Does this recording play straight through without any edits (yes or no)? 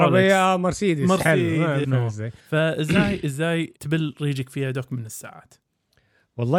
no